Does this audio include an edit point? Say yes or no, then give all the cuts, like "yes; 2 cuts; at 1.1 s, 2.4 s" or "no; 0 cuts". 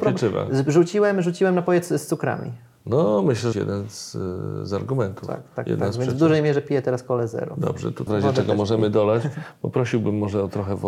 yes; 2 cuts; at 3.5 s, 8.1 s